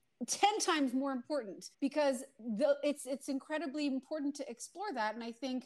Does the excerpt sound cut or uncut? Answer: cut